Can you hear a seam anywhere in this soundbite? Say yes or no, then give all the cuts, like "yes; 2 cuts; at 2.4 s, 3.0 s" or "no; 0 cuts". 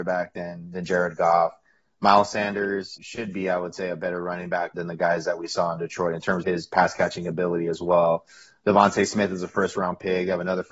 yes; 3 cuts; at 3.0 s, 4.7 s, 6.4 s